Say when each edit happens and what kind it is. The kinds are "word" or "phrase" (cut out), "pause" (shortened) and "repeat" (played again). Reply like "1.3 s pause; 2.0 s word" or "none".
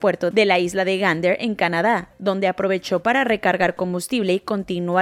none